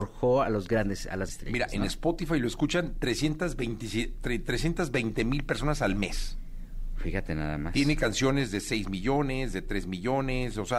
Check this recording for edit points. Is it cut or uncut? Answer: cut